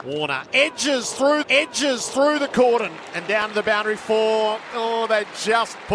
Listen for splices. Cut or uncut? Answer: cut